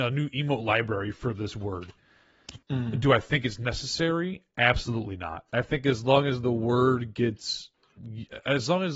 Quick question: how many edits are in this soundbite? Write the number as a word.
two